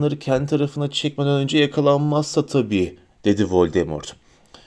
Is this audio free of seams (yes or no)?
yes